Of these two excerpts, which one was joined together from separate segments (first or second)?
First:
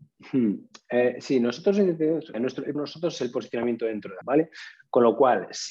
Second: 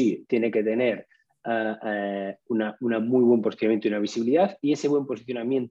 first